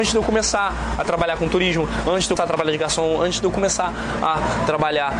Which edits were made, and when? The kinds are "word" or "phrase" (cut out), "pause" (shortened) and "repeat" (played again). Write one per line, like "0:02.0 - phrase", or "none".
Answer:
0:02.4 - word